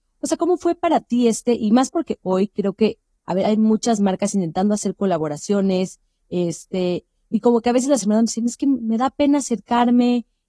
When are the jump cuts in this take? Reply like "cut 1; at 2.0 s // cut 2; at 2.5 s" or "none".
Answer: cut 1; at 3.1 s